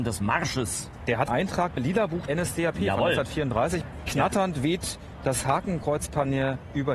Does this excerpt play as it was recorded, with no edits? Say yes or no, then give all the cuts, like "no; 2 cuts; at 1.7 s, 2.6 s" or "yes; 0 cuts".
no; 3 cuts; at 1.3 s, 1.8 s, 2.3 s